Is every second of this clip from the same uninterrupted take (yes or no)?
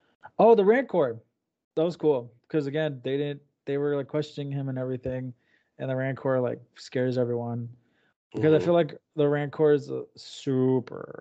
yes